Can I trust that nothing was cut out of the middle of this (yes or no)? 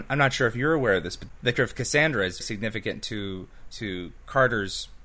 no